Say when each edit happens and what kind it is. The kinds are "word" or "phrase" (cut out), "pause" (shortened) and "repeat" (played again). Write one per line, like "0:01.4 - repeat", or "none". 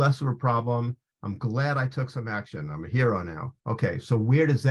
0:03.6 - pause